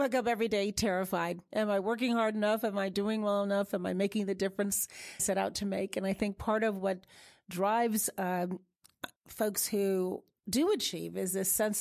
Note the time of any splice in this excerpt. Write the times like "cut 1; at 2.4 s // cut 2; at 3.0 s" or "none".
cut 1; at 5.2 s // cut 2; at 9.2 s